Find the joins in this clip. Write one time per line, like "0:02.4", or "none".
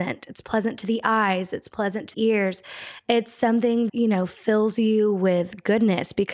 0:02.1
0:03.9